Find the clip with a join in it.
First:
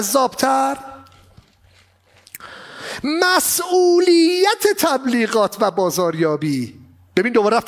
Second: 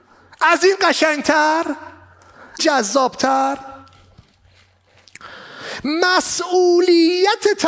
second; 1 cut; at 2.6 s

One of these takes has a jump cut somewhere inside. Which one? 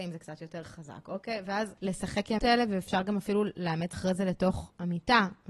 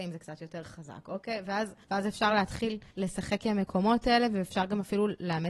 first; 3 cuts; at 1.8 s, 2.4 s, 3.9 s

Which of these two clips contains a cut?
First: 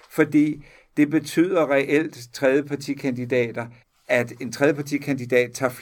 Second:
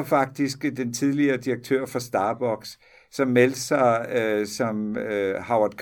first; 1 cut; at 3.8 s

